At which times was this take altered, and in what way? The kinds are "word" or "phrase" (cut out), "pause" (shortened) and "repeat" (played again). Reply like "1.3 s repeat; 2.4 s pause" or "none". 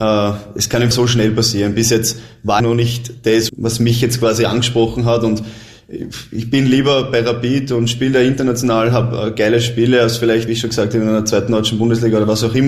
0.9 s word; 2.6 s word; 3.5 s word; 10.5 s word